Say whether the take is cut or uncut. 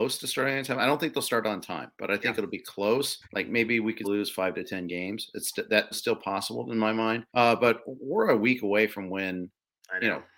cut